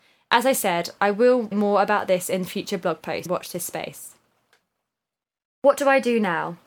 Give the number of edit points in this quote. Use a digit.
2